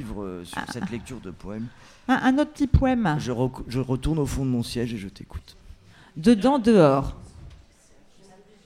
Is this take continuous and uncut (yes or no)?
yes